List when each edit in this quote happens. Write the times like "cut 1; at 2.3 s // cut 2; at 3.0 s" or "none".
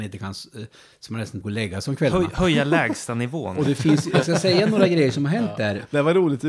cut 1; at 1.4 s